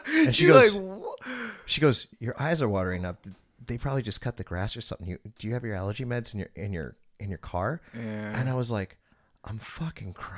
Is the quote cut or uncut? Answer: uncut